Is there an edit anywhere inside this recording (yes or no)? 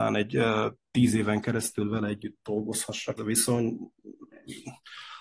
yes